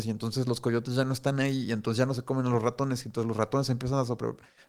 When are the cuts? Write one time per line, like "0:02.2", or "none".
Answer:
none